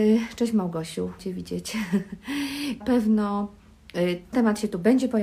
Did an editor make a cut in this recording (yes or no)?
yes